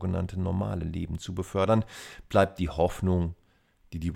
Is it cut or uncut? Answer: uncut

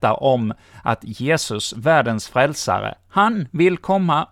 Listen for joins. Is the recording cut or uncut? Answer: uncut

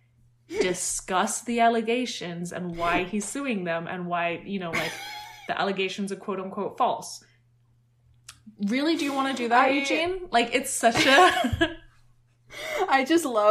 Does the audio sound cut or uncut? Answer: uncut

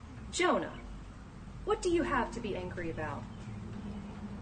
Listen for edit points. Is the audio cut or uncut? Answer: uncut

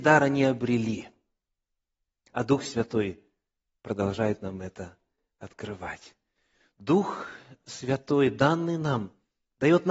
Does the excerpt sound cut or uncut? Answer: uncut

